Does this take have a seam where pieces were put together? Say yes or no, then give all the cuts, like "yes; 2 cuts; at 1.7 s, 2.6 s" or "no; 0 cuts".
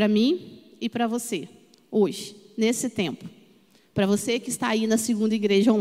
no; 0 cuts